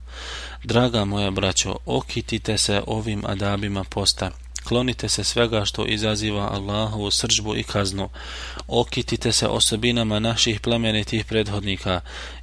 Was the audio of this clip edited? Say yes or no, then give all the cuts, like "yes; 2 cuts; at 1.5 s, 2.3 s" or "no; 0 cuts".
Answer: no; 0 cuts